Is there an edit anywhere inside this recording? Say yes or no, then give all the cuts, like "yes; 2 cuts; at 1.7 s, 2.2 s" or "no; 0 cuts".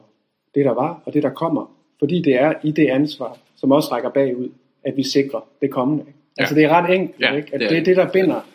no; 0 cuts